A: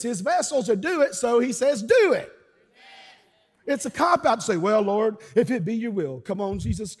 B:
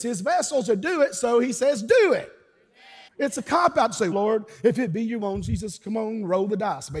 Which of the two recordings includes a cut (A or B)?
B